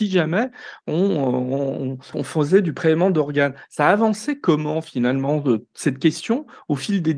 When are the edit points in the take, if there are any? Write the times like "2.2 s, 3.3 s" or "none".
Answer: 2.1 s

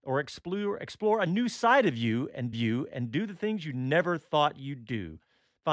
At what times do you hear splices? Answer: 2.5 s

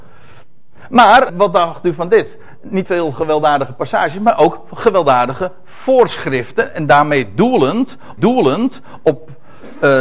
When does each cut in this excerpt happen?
1.3 s, 2.9 s, 8.2 s

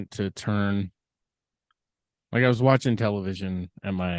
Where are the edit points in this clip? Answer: none

